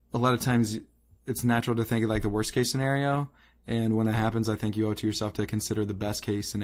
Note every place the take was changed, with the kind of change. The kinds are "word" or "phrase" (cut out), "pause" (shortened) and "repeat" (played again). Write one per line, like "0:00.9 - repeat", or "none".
none